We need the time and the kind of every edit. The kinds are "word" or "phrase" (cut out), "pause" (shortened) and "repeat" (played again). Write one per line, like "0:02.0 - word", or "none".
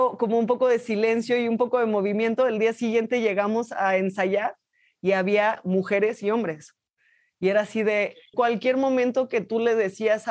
0:08.3 - word